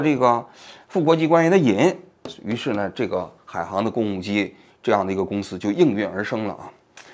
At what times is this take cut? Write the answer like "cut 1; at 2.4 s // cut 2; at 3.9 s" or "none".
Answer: none